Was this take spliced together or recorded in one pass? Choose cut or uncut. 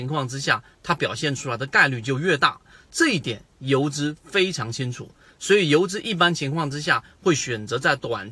uncut